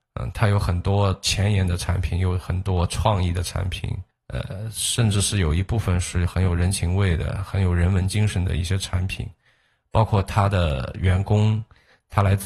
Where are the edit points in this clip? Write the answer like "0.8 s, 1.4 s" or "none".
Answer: 4.1 s